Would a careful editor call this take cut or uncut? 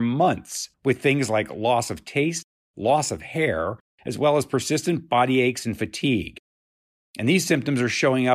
uncut